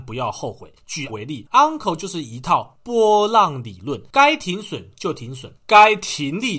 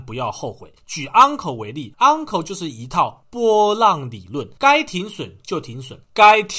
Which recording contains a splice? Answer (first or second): first